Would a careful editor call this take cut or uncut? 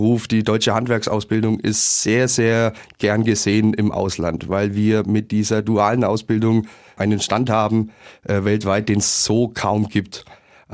uncut